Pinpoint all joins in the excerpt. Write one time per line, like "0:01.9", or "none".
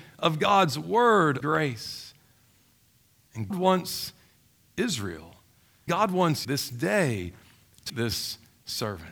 0:01.4
0:03.5
0:05.9
0:06.4
0:07.9